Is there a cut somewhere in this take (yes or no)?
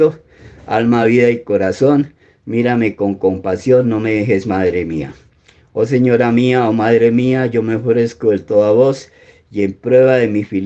no